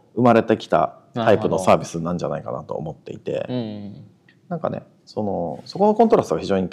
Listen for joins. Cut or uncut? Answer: uncut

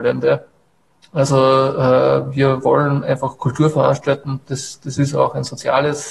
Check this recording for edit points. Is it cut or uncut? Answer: uncut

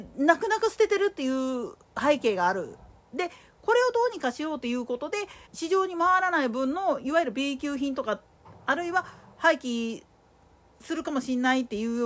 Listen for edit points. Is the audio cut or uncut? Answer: cut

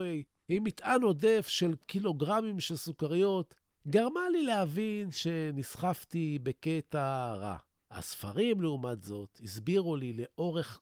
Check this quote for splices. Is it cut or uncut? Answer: cut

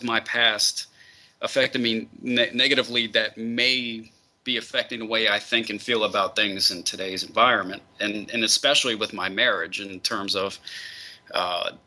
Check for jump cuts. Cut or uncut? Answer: uncut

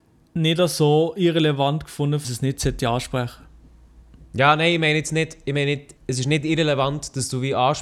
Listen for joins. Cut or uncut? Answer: cut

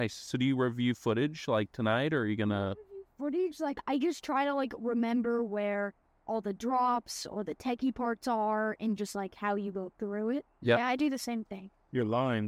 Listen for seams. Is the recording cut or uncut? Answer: uncut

